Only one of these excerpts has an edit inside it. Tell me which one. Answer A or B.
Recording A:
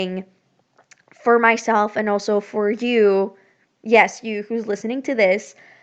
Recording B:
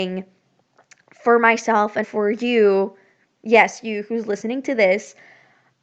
B